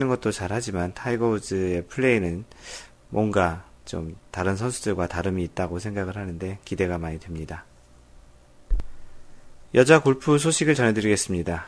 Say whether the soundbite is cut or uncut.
uncut